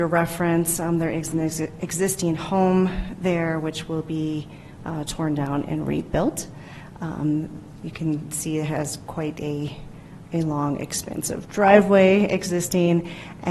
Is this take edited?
no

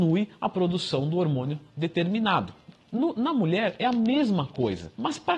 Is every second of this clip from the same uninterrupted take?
yes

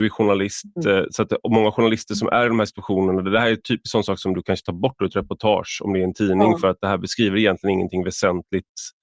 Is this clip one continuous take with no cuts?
yes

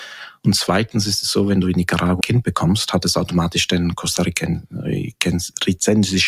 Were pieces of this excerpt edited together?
yes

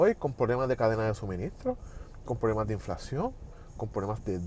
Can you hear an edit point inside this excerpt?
no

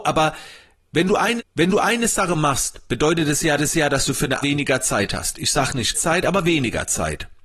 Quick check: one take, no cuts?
no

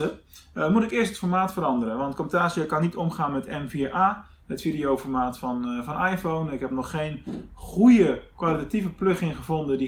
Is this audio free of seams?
yes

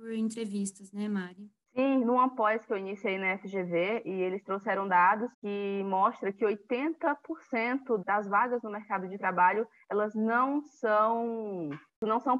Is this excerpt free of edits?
no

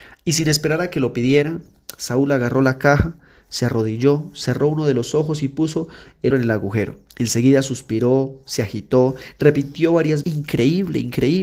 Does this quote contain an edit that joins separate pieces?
yes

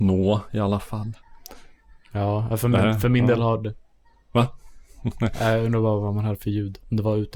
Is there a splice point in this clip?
no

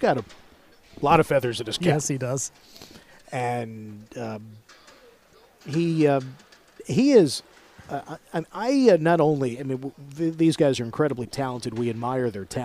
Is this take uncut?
yes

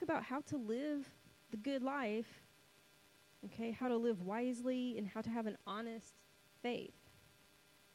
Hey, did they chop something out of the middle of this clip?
no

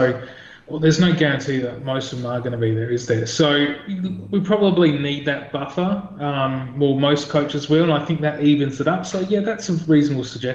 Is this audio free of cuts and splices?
yes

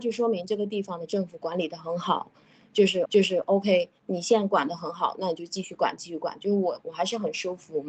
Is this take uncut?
no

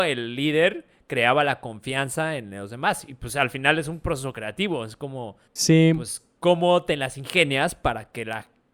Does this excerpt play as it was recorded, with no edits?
no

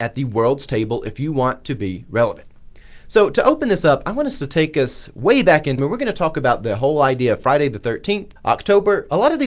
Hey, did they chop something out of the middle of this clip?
yes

